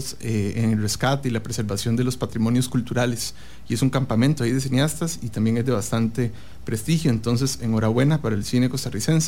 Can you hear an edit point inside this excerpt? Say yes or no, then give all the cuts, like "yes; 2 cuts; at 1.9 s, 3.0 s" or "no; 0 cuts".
no; 0 cuts